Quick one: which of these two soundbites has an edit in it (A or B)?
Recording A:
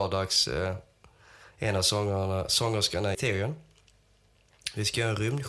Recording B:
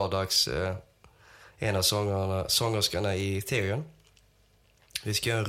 A